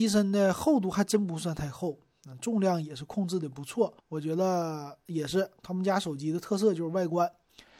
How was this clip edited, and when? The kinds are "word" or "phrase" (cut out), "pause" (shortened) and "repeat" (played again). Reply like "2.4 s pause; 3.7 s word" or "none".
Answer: 4.0 s pause